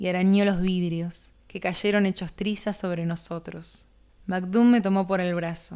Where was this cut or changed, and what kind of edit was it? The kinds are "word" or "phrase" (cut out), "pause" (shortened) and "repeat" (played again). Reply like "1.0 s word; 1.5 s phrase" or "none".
1.4 s pause; 4.1 s pause